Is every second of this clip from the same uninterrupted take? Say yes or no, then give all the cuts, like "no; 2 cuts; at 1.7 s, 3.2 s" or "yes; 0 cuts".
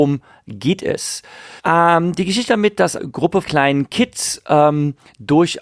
no; 4 cuts; at 1.6 s, 2.5 s, 3.0 s, 3.4 s